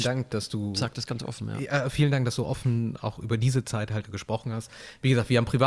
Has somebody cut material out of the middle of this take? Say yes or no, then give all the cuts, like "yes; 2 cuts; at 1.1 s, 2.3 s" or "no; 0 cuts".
yes; 1 cut; at 4.0 s